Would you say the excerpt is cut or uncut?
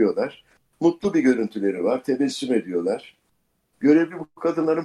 uncut